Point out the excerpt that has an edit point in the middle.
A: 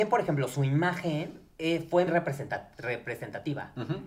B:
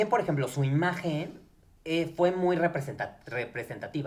A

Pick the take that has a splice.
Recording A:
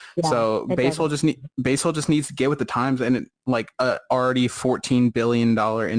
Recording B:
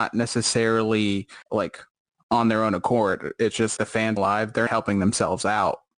B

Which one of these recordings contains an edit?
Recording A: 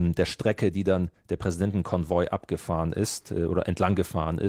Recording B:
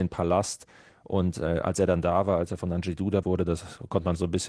B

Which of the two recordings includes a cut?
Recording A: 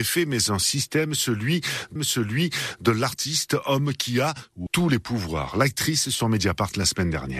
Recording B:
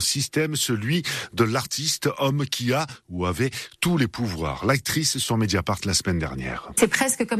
A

